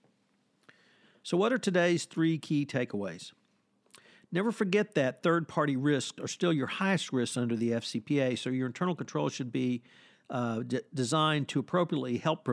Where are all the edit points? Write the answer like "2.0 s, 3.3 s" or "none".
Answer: none